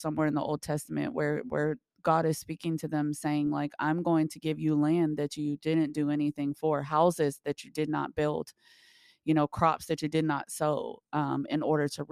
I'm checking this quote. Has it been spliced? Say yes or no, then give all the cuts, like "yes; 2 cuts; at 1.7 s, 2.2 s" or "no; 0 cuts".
no; 0 cuts